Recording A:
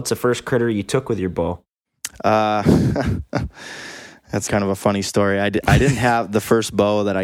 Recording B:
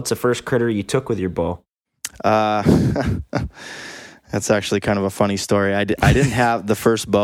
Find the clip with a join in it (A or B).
A